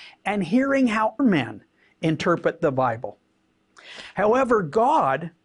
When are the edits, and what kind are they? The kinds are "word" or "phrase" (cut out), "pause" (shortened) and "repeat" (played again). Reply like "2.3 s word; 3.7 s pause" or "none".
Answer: 1.2 s word